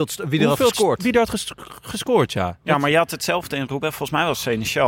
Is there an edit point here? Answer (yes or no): no